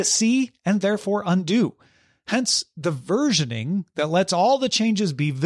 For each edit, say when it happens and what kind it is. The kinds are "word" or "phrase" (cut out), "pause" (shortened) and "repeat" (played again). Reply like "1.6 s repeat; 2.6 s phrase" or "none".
none